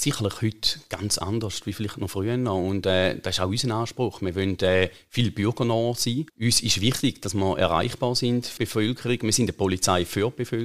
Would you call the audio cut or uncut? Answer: cut